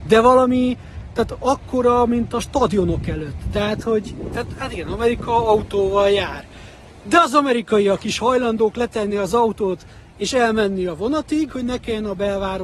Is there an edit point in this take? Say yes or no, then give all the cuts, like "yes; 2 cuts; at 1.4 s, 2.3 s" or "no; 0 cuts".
no; 0 cuts